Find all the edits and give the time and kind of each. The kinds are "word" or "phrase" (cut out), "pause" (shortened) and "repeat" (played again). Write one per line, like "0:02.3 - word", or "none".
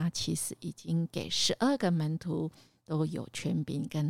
none